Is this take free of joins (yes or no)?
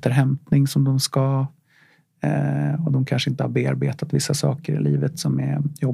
yes